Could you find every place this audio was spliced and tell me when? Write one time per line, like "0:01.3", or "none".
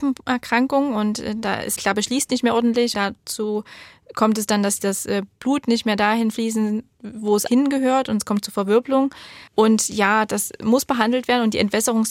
0:01.8
0:02.9
0:07.5
0:09.5